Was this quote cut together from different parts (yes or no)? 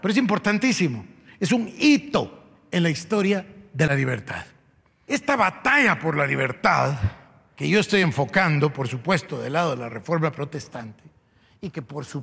no